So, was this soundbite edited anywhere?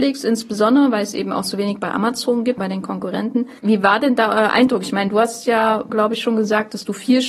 yes; 3 cuts; at 2.6 s, 3.6 s, 5.9 s

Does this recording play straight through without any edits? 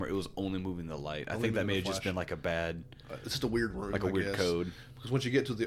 yes; 0 cuts

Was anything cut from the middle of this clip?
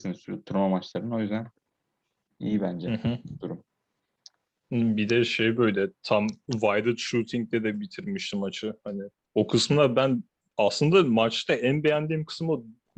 no; 0 cuts

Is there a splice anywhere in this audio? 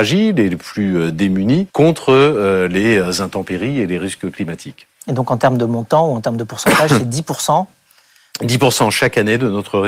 yes; 1 cut; at 1.7 s

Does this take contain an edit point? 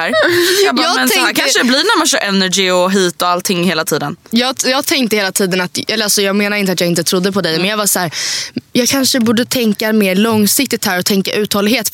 no; 0 cuts

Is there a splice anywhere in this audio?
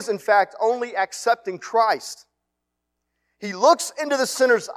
no; 0 cuts

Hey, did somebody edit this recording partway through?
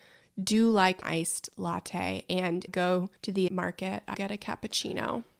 yes; 5 cuts; at 1.0 s, 2.7 s, 3.2 s, 3.5 s, 4.1 s

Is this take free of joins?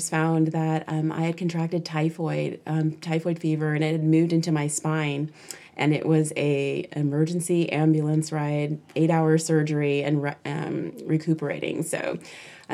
yes; 0 cuts

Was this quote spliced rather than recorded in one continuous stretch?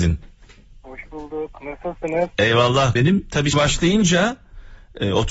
yes; 2 cuts; at 3.0 s, 3.5 s

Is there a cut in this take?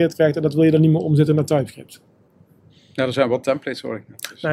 no; 0 cuts

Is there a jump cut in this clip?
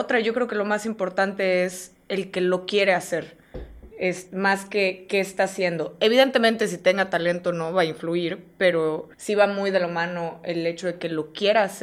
yes; 2 cuts; at 3.9 s, 9.1 s

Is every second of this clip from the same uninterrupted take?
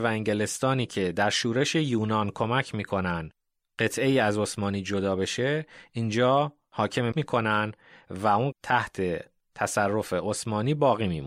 no; 2 cuts; at 7.1 s, 8.5 s

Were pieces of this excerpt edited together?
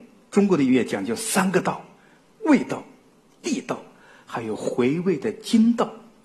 no; 0 cuts

